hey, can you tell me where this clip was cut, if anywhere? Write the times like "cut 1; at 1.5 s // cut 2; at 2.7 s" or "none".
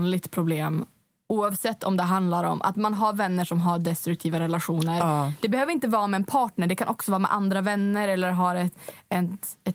none